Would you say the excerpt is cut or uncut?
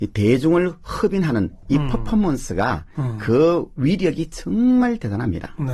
uncut